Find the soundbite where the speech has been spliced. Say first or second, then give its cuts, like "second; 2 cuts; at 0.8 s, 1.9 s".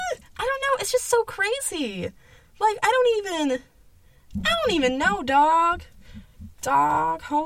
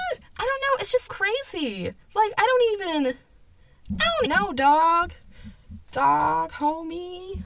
second; 3 cuts; at 1.1 s, 2.0 s, 4.3 s